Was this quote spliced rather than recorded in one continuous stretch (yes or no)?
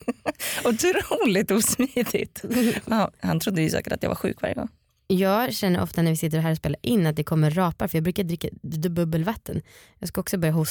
no